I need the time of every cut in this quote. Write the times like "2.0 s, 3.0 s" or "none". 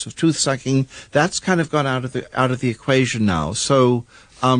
none